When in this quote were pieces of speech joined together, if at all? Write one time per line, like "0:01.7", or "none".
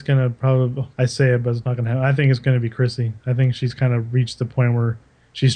0:00.9